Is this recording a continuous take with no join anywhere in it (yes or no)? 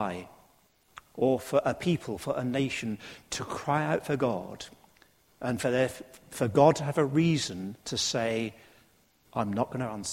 yes